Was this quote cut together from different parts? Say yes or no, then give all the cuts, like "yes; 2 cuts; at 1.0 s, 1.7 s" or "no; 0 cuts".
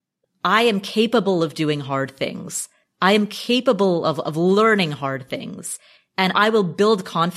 no; 0 cuts